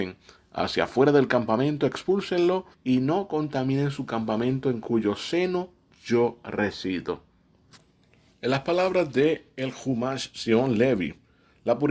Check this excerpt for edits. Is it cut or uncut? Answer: cut